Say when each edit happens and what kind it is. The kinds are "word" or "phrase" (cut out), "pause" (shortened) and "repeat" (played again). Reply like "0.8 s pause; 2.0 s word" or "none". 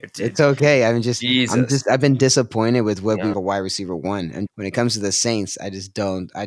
3.3 s phrase; 4.5 s word